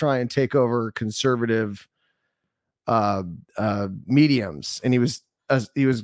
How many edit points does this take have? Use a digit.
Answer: 1